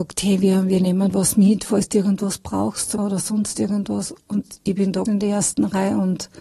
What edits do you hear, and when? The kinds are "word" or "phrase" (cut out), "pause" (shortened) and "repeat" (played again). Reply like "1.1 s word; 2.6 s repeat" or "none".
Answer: 3.0 s word; 5.1 s word